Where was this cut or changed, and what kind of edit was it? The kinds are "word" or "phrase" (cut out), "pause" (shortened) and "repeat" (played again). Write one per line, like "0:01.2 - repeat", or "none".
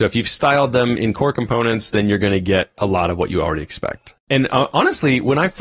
0:04.2 - pause